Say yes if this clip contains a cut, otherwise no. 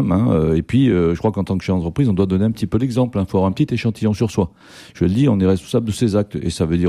no